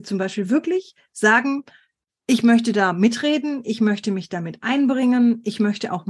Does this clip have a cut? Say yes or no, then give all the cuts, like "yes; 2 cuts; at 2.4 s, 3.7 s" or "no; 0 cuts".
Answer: no; 0 cuts